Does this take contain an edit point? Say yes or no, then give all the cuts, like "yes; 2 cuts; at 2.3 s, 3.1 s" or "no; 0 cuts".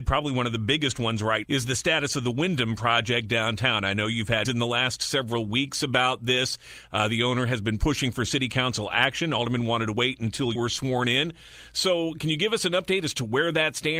yes; 3 cuts; at 1.4 s, 4.4 s, 10.5 s